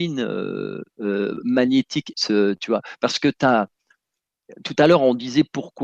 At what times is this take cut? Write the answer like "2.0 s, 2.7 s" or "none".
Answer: 0.9 s, 2.1 s